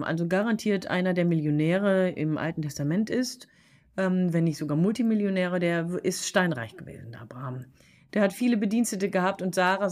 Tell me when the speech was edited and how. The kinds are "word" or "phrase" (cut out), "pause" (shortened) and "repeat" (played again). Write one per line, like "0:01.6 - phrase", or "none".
none